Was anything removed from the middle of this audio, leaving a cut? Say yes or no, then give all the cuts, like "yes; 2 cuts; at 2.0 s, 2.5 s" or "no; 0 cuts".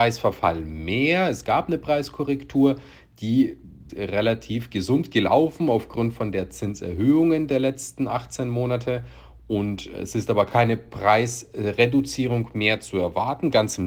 yes; 1 cut; at 3.9 s